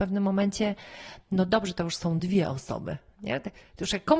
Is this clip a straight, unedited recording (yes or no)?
yes